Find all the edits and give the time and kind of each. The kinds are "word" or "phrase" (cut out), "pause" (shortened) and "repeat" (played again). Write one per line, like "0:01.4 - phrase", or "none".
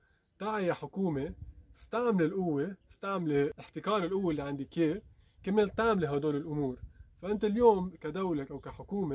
0:02.8 - pause

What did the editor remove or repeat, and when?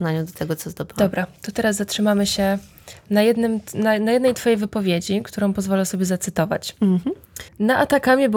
0:07.5 - pause

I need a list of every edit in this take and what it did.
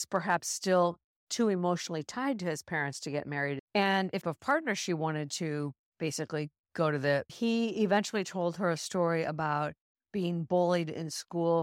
0:03.7 - pause
0:04.2 - phrase
0:07.3 - phrase

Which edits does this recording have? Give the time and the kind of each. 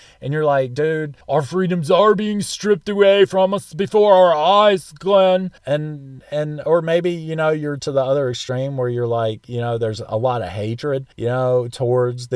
0:01.2 - pause
0:05.6 - pause
0:11.1 - pause

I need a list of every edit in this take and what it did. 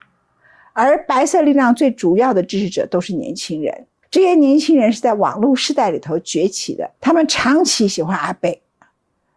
0:04.0 - pause
0:07.0 - pause

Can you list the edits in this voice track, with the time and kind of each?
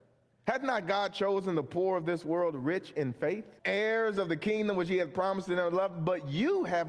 0:03.6 - pause

